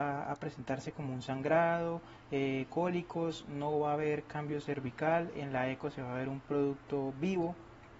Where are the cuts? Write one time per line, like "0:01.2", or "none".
0:02.7

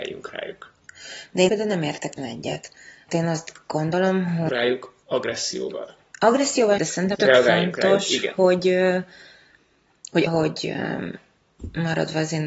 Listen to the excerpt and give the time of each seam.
0:01.5
0:02.2
0:03.1
0:04.5
0:06.8
0:07.1
0:10.3

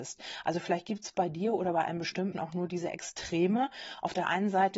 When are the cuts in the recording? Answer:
0:02.3

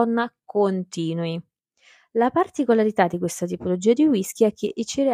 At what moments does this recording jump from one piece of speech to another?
none

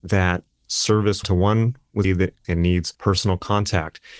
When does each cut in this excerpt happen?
0:01.2
0:02.0
0:02.4
0:02.9

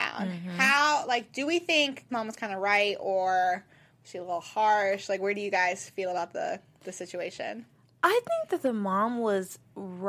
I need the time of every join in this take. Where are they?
0:02.1

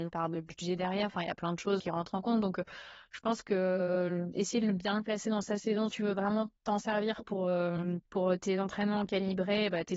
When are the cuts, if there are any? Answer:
0:01.8
0:05.9
0:06.6
0:08.1

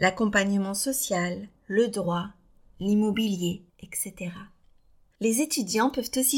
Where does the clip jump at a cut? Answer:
0:01.6
0:03.7

